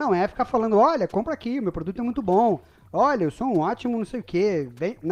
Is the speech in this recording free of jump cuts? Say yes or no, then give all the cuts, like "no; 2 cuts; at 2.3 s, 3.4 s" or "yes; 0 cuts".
yes; 0 cuts